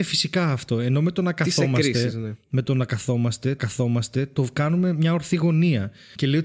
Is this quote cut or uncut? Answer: cut